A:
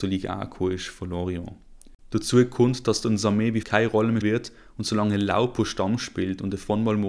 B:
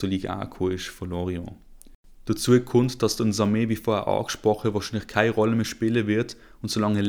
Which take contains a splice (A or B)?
A